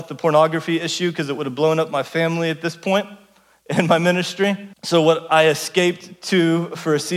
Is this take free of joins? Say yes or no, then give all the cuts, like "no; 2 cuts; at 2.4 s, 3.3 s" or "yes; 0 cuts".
no; 1 cut; at 4.7 s